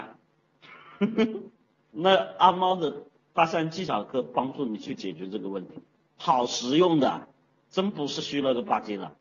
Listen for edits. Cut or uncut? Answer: uncut